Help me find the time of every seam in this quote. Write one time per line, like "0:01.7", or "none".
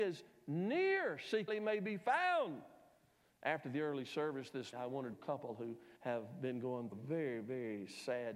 0:01.5
0:04.7
0:05.1
0:06.0
0:06.9

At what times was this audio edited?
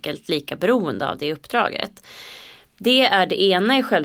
none

